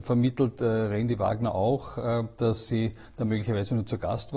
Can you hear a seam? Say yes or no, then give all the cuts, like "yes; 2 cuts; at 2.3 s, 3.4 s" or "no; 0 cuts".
no; 0 cuts